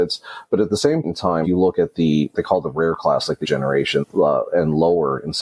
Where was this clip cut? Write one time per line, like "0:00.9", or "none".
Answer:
0:01.0
0:01.4
0:02.3
0:03.4
0:04.0